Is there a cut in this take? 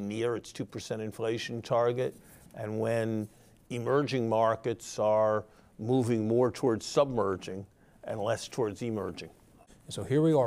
no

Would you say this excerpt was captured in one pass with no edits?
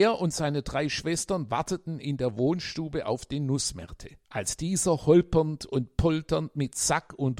no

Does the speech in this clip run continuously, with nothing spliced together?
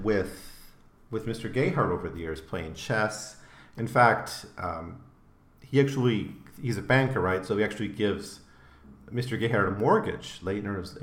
yes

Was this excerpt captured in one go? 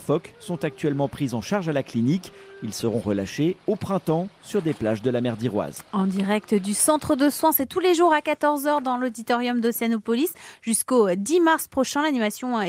yes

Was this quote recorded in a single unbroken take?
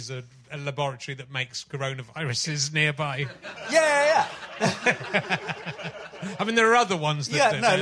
yes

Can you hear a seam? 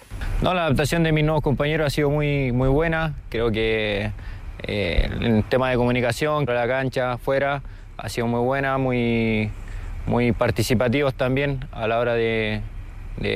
yes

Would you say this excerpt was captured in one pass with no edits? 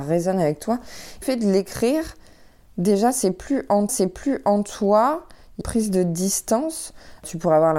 no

